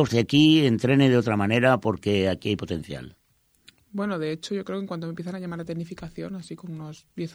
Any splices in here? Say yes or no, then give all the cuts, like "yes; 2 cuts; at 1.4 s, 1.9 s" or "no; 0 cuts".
no; 0 cuts